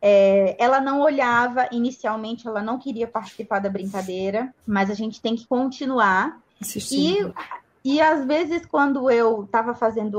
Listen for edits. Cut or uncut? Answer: cut